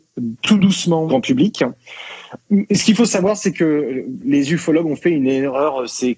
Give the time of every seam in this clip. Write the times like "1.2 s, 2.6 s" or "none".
1.1 s